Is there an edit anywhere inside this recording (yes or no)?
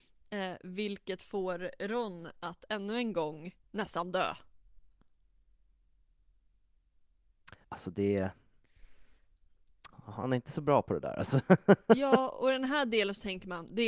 yes